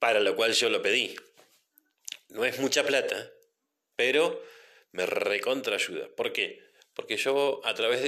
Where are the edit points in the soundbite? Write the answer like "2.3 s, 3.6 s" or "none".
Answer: none